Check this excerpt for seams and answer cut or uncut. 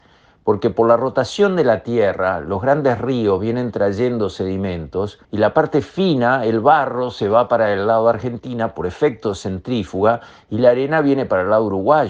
cut